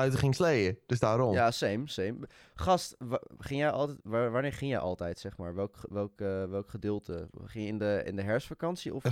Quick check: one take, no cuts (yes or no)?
yes